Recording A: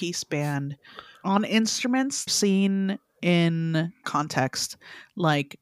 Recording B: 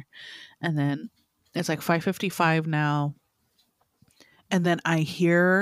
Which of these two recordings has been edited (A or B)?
A